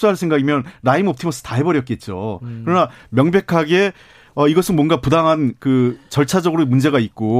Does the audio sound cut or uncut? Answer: uncut